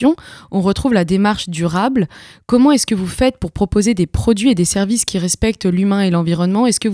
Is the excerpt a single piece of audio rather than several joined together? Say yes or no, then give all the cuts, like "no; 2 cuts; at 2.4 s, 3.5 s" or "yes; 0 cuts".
yes; 0 cuts